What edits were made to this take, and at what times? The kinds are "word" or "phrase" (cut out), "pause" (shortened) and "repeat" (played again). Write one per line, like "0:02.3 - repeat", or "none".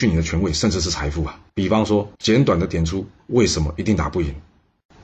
0:01.5 - pause
0:02.1 - pause